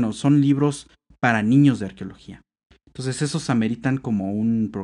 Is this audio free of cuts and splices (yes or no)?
yes